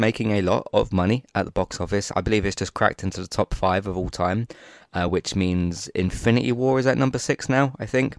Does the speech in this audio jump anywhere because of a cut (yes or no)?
no